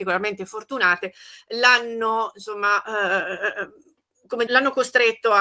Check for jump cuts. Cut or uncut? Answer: cut